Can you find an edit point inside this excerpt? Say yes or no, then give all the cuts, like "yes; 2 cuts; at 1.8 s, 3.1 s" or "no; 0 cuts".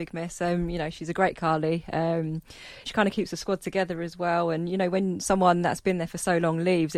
yes; 2 cuts; at 1.4 s, 2.9 s